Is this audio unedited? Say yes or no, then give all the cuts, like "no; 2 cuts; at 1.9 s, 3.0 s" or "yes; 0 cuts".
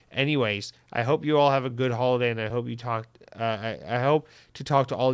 yes; 0 cuts